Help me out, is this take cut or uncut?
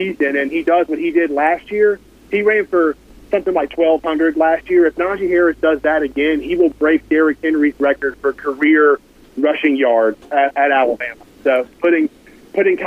uncut